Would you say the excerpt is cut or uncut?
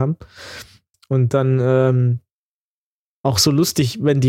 uncut